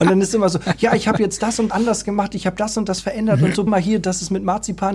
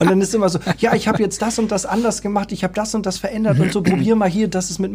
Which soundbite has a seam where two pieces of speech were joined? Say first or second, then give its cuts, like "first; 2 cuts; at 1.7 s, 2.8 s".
first; 2 cuts; at 1.7 s, 3.7 s